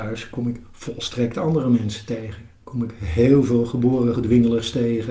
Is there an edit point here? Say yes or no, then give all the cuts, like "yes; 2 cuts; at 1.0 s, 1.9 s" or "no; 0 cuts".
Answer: yes; 1 cut; at 4.2 s